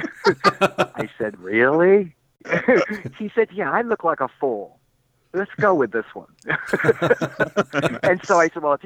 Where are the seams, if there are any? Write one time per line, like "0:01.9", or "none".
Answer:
none

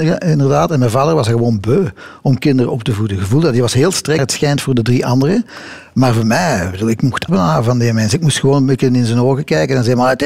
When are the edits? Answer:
0:04.2
0:07.3

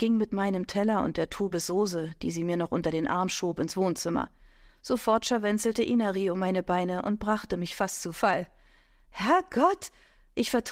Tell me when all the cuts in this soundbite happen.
none

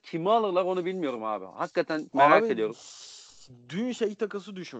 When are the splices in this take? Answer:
0:02.1

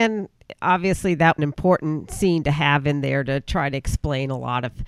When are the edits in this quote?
0:01.4

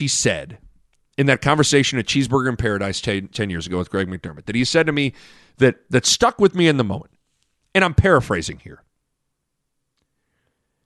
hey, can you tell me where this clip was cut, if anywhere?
none

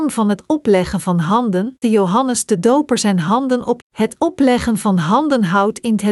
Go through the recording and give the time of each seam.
0:01.8
0:03.8

